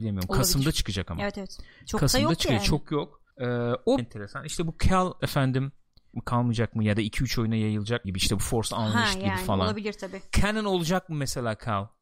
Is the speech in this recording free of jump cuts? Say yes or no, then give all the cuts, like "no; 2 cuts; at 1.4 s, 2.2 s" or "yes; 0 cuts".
no; 5 cuts; at 3.3 s, 4.0 s, 5.2 s, 6.1 s, 8.0 s